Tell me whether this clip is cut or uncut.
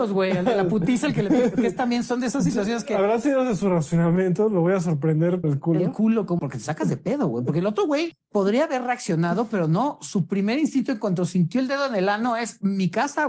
cut